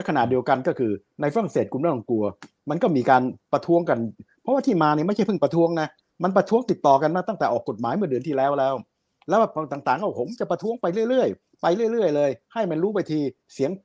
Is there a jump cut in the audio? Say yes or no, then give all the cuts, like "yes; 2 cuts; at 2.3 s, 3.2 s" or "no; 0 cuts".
no; 0 cuts